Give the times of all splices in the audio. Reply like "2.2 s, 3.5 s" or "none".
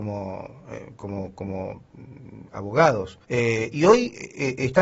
3.2 s